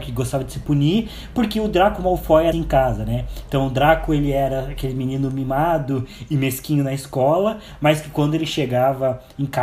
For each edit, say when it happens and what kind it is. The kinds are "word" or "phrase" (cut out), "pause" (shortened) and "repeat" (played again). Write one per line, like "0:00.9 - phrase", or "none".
0:02.5 - word